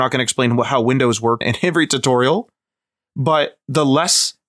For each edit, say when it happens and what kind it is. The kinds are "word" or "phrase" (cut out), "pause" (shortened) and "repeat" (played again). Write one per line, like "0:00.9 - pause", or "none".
0:01.4 - word